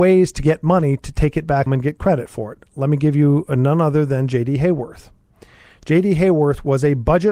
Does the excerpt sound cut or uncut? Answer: cut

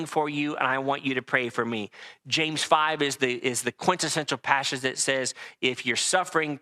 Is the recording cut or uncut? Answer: uncut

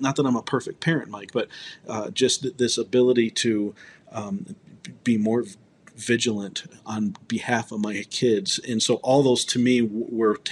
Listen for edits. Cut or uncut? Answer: uncut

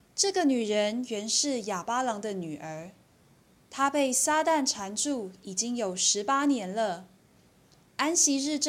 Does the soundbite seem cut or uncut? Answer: uncut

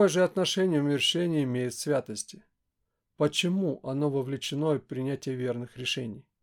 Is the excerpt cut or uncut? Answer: uncut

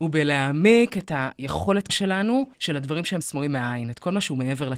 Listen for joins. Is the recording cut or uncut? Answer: cut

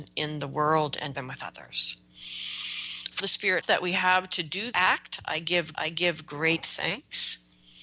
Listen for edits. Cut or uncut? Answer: cut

